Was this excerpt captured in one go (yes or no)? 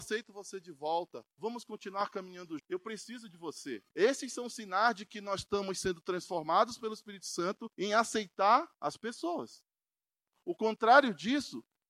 no